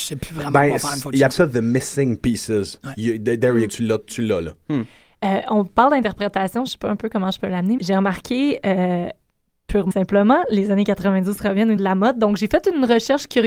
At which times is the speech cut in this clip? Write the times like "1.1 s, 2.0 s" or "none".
1.3 s, 3.7 s, 7.8 s, 9.9 s, 11.8 s